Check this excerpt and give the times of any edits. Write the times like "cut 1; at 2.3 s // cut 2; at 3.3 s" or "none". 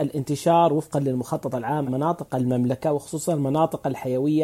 cut 1; at 1.9 s